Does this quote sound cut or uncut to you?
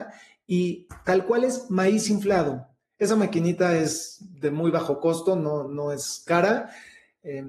uncut